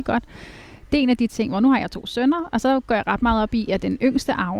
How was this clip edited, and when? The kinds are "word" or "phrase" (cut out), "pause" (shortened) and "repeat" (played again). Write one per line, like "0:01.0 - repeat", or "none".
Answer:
none